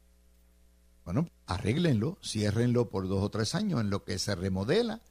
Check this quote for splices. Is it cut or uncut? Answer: cut